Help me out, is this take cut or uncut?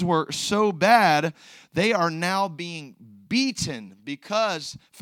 uncut